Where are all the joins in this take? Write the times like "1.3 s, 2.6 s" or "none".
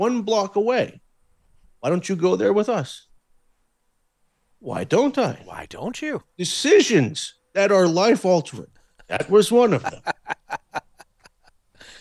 6.3 s